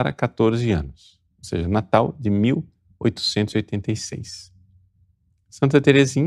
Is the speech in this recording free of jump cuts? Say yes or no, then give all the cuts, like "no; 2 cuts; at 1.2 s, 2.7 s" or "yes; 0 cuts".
yes; 0 cuts